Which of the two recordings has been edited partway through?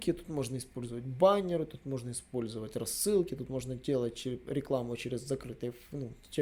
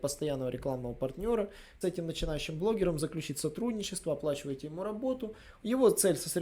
second; 1 cut; at 1.8 s

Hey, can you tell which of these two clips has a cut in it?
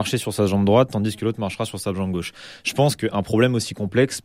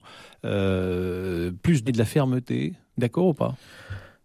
second; 1 cut; at 1.9 s

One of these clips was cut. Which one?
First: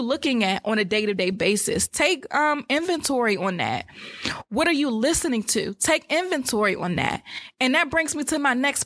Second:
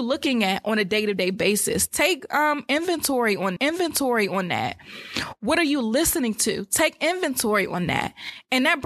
second; 1 cut; at 3.6 s

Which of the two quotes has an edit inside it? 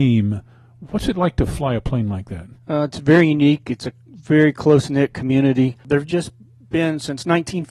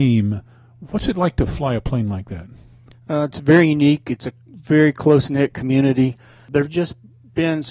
first; 2 cuts; at 2.5 s, 5.8 s

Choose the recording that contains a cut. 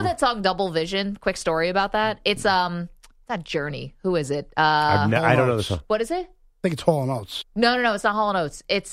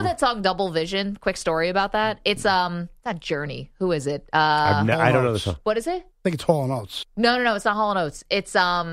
second; 2 cuts; at 3.0 s, 6.1 s

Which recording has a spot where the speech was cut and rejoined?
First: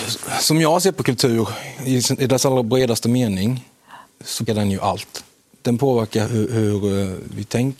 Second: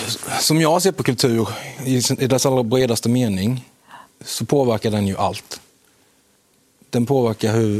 first; 3 cuts; at 4.5 s, 5.4 s, 6.2 s

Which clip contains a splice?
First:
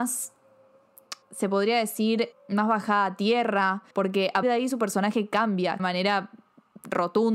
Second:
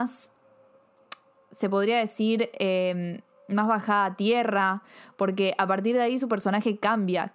first; 5 cuts; at 1.2 s, 2.3 s, 3.9 s, 4.4 s, 5.8 s

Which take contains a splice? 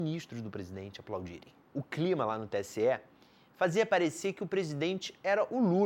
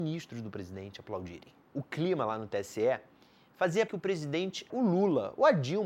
second; 2 cuts; at 3.9 s, 4.7 s

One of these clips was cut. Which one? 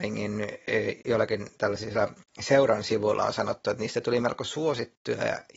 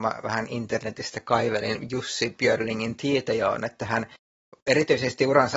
first; 1 cut; at 1.0 s

